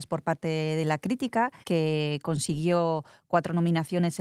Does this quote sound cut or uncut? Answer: cut